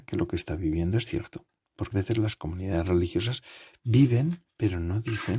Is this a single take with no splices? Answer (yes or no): no